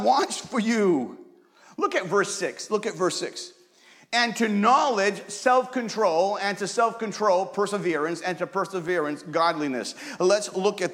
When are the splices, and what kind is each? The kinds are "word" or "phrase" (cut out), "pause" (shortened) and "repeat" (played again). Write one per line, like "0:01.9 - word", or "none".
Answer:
none